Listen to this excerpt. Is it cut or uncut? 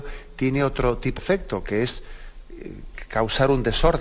cut